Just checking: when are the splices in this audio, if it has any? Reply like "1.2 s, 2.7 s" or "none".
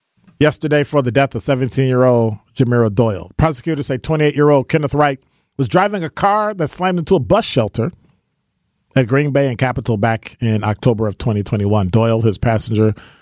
none